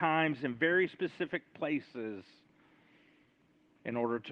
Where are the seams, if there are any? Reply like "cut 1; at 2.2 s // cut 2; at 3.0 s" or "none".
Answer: none